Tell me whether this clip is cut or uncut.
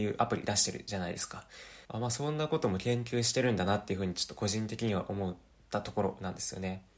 cut